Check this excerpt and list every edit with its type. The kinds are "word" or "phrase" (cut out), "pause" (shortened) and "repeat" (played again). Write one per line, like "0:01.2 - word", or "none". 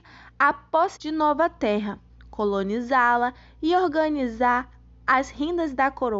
0:01.0 - word